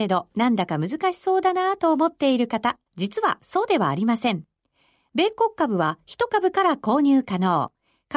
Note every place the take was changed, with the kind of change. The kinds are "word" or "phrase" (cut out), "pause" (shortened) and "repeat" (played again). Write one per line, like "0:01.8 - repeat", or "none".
0:02.9 - pause